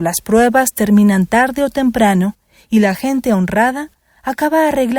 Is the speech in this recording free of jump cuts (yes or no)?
yes